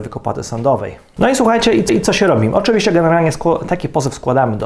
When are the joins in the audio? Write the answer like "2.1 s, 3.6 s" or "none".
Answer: 1.9 s